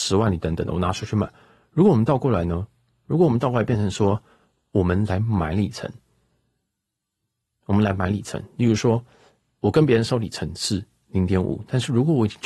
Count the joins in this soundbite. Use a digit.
0